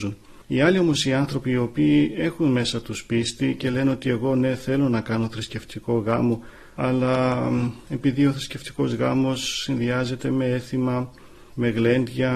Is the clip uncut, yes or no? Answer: yes